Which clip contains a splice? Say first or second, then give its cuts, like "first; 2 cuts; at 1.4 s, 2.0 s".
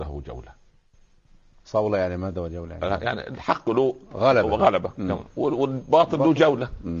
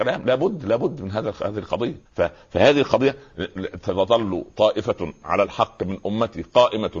second; 1 cut; at 2.1 s